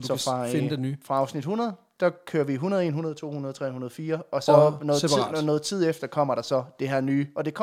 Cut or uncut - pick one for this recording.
uncut